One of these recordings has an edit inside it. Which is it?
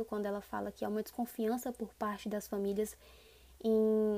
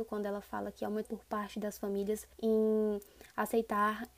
second; 2 cuts; at 1.0 s, 2.3 s

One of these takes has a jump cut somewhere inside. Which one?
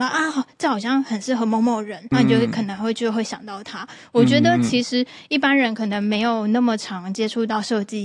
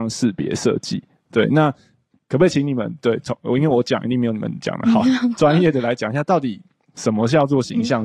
first; 1 cut; at 2.1 s

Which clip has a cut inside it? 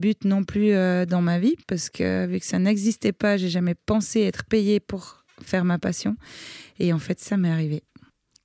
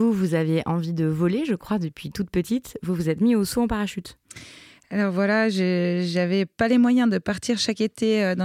first; 1 cut; at 1.6 s

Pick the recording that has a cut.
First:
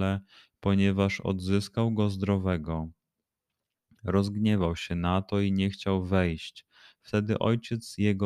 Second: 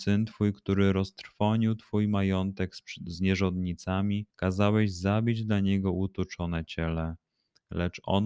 second; 1 cut; at 4.3 s

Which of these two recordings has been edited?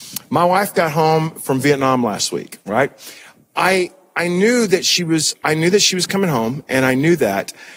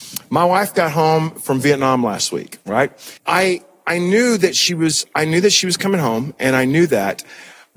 second; 1 cut; at 3.2 s

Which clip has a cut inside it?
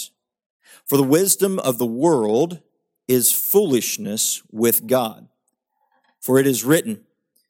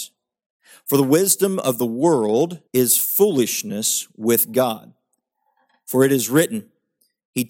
second; 1 cut; at 2.7 s

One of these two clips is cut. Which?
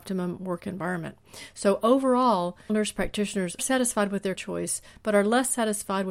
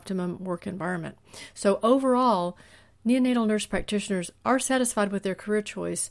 first; 3 cuts; at 2.7 s, 3.6 s, 4.4 s

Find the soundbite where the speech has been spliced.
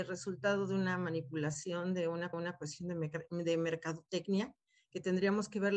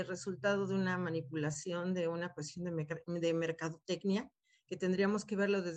first; 1 cut; at 2.3 s

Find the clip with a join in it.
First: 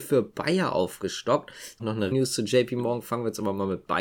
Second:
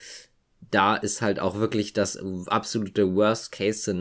first; 2 cuts; at 1.8 s, 2.1 s

